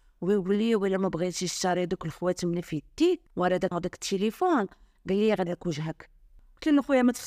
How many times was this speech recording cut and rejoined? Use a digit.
3